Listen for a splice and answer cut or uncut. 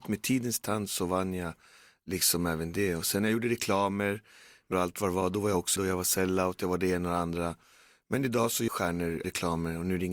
cut